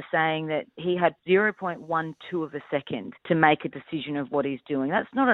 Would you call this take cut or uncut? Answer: cut